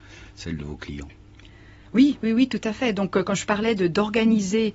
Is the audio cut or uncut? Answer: uncut